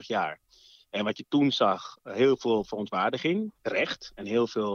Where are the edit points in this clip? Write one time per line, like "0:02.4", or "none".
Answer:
0:03.6